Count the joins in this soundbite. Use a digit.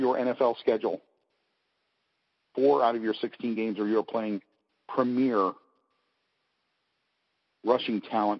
0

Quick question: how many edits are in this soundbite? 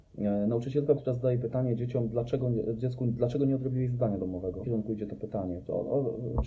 1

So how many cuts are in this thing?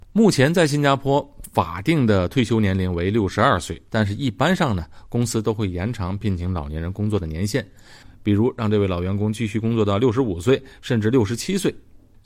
1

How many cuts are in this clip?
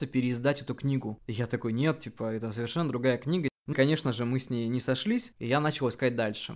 1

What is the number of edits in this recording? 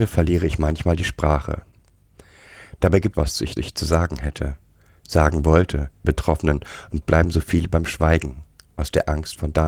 4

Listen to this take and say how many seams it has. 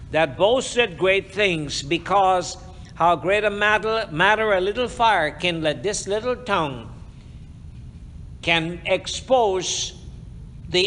0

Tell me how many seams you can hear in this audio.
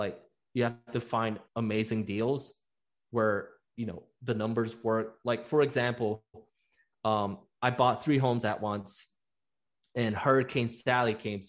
1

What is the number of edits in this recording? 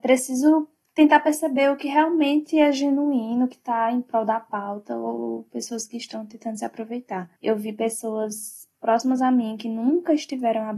2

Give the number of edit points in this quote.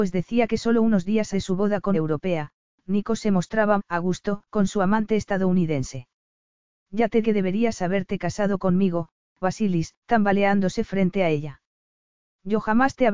7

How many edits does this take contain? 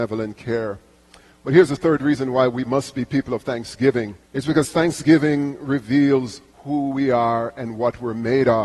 2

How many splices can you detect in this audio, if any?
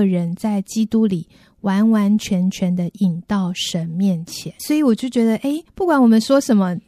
2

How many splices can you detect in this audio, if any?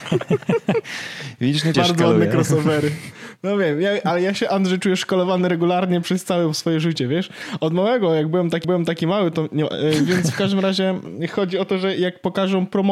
2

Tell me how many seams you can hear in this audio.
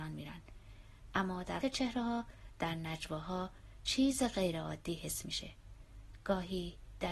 1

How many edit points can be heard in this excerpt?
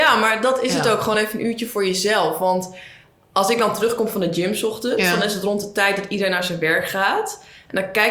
0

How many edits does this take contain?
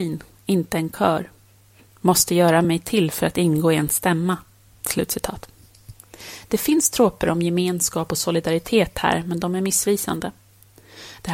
0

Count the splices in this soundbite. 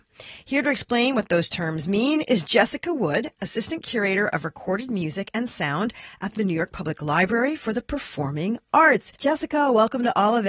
1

